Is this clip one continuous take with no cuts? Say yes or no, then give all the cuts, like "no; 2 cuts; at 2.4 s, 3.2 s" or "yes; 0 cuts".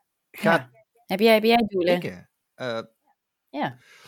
yes; 0 cuts